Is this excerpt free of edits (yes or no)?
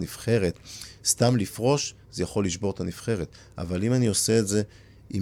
yes